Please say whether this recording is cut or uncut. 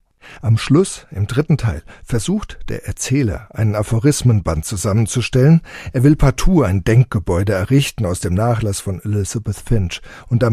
uncut